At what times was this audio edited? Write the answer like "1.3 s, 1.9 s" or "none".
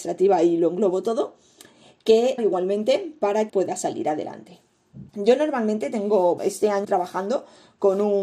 2.4 s, 3.5 s, 5.1 s, 6.4 s, 6.8 s